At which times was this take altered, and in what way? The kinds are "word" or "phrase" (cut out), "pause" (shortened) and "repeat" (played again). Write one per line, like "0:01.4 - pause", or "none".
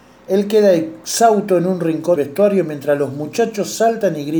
0:02.2 - word

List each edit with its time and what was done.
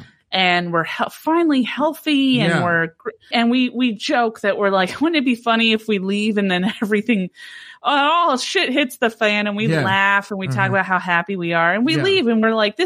0:03.3 - word

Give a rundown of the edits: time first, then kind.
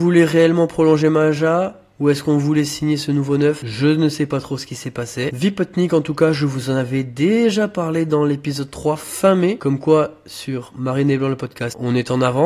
none

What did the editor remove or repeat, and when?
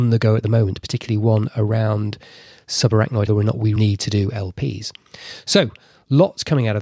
0:03.3 - phrase
0:03.8 - word

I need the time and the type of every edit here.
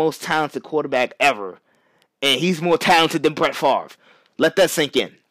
none

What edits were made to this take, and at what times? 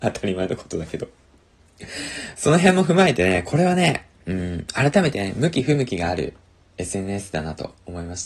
0:04.1 - pause

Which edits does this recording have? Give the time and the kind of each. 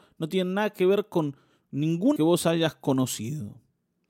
0:02.2 - phrase

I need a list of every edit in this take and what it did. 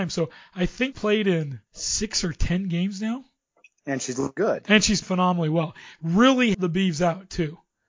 0:00.9 - word
0:01.7 - pause
0:03.5 - pause
0:04.4 - word
0:05.0 - word
0:06.5 - word

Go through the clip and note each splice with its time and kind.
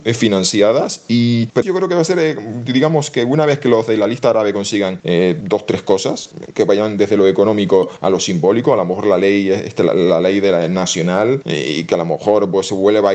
0:01.6 - word

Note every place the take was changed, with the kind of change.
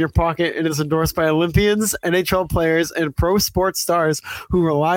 none

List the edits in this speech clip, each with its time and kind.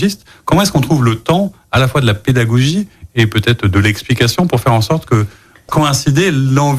0:05.7 - word

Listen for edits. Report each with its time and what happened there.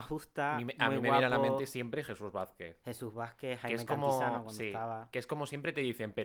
none

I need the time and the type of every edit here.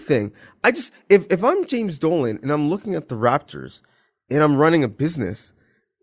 none

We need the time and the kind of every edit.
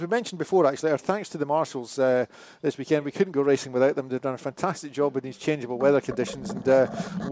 none

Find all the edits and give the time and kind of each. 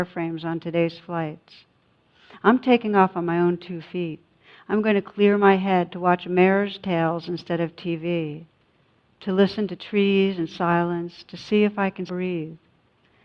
0:12.1 - word

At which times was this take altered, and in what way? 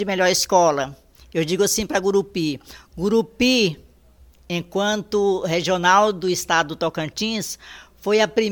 none

